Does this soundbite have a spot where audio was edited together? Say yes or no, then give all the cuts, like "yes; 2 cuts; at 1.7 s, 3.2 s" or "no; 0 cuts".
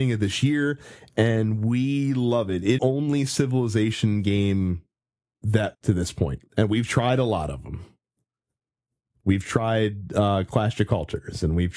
yes; 3 cuts; at 2.8 s, 5.7 s, 6.5 s